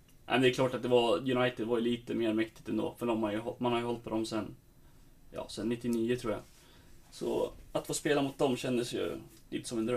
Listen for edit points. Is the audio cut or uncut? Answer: uncut